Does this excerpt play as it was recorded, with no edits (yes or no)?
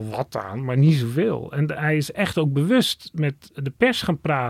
yes